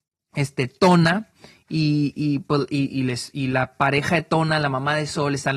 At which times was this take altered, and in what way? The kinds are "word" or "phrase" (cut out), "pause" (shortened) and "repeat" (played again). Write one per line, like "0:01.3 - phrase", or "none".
none